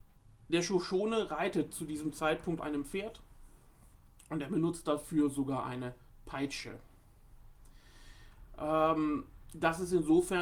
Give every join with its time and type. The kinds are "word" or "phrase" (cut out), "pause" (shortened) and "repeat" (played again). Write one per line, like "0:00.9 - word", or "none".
0:02.6 - word